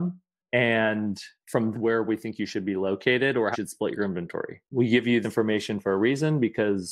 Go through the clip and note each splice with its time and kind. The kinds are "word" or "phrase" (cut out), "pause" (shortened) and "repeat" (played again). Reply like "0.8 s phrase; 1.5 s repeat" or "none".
1.7 s phrase; 3.5 s word; 4.7 s pause; 5.2 s word